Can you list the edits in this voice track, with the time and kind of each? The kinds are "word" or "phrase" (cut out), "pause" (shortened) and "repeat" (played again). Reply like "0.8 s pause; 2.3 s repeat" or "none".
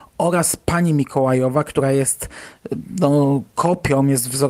none